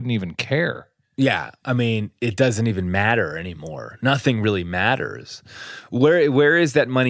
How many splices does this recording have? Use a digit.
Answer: 0